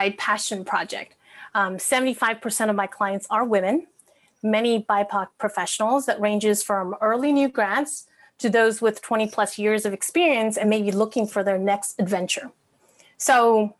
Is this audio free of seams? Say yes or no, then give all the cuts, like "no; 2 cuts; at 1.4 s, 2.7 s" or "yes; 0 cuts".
yes; 0 cuts